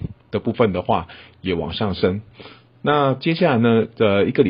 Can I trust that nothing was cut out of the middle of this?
yes; 0 cuts

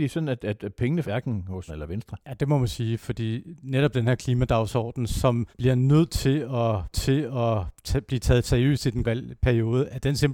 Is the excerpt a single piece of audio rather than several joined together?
no; 6 cuts; at 1.0 s, 1.7 s, 2.2 s, 5.5 s, 6.9 s, 9.0 s

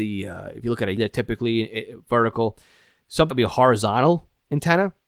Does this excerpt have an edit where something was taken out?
yes; 2 cuts; at 1.0 s, 3.3 s

